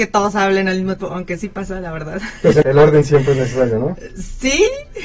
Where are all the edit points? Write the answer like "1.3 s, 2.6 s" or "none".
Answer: 1.0 s, 2.6 s